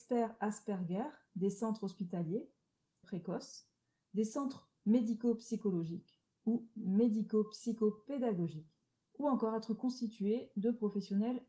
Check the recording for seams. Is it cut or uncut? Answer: cut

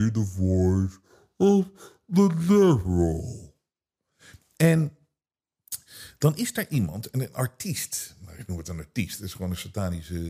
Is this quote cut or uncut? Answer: uncut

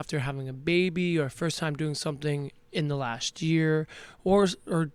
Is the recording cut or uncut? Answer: cut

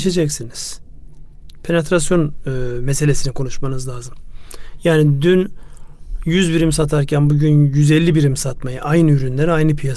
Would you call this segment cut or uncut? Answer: uncut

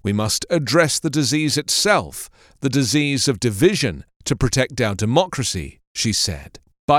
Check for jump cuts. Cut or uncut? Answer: uncut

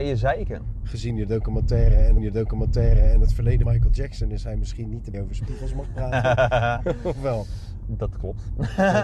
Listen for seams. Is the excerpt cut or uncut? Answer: cut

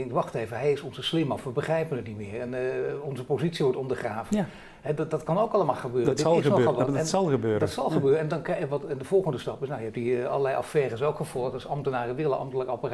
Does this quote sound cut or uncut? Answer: uncut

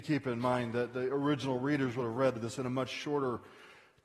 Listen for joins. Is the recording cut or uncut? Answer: uncut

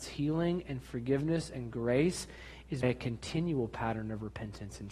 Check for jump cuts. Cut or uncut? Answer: cut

